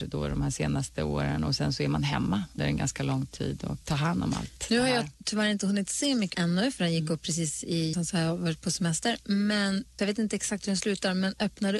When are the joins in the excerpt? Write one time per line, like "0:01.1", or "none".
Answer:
0:02.6
0:03.8
0:06.3
0:07.9
0:10.0